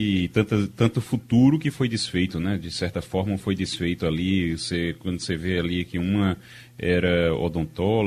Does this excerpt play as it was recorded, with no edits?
no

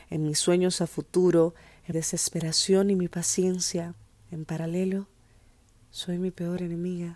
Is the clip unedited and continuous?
no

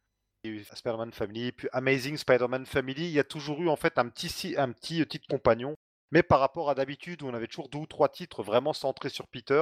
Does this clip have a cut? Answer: no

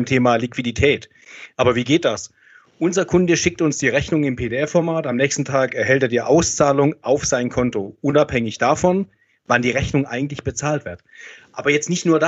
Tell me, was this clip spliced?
no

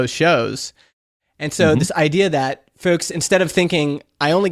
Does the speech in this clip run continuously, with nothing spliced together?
yes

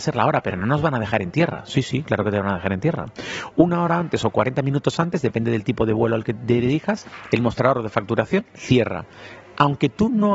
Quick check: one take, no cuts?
yes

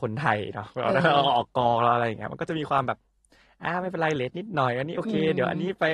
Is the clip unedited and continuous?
yes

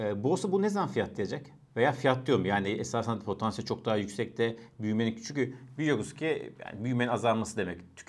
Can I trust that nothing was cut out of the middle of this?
yes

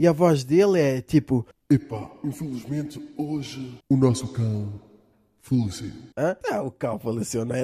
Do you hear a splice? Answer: yes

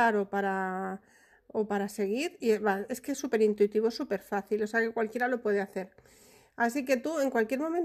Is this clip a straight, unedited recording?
yes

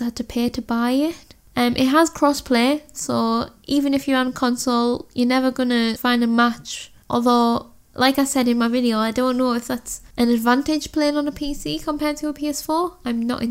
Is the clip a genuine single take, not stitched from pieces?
no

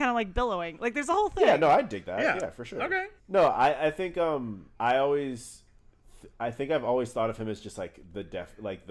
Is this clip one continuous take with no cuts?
no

